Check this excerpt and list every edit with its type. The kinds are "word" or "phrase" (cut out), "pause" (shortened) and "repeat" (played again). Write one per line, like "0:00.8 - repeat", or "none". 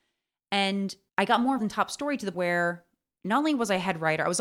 0:01.1 - pause
0:01.6 - word
0:02.3 - word